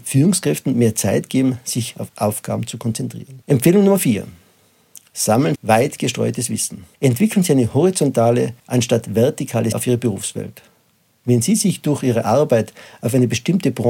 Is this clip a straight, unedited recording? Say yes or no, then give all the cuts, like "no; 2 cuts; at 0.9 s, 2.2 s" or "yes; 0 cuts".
no; 6 cuts; at 2.1 s, 3.4 s, 5.6 s, 6.9 s, 8.6 s, 9.7 s